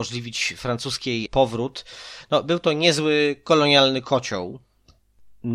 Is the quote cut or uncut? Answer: cut